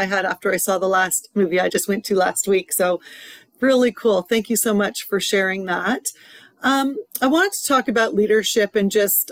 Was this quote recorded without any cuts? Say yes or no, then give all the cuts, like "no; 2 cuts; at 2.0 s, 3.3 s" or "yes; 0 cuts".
yes; 0 cuts